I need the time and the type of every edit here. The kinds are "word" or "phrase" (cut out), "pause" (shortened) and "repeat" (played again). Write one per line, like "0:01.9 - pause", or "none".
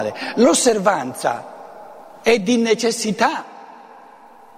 none